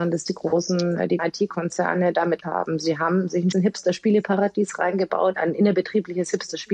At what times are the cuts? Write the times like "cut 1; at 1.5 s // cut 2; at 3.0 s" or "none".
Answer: cut 1; at 1.2 s // cut 2; at 2.4 s // cut 3; at 3.5 s // cut 4; at 5.3 s